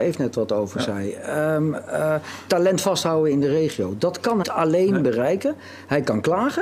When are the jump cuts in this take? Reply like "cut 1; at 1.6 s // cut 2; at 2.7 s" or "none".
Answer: cut 1; at 4.4 s